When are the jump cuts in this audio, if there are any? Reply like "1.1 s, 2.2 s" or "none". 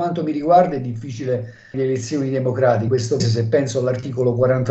1.7 s, 2.9 s, 3.2 s